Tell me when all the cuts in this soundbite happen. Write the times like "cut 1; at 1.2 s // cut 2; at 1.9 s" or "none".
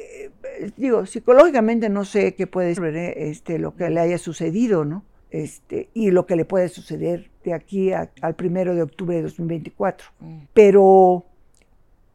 cut 1; at 2.8 s // cut 2; at 5.2 s // cut 3; at 7.4 s // cut 4; at 8.2 s // cut 5; at 10.5 s